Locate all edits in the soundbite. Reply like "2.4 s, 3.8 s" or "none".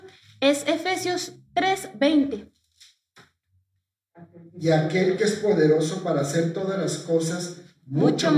none